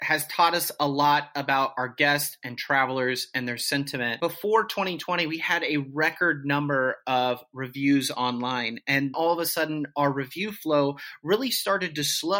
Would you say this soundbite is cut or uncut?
cut